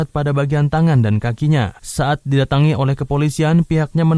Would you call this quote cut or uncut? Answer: uncut